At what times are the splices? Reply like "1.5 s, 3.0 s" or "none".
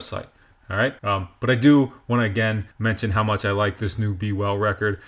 1.0 s, 2.7 s